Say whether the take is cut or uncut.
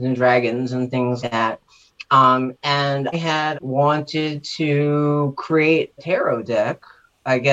cut